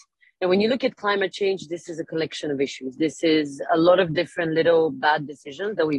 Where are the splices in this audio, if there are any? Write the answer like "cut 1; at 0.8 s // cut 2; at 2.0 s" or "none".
none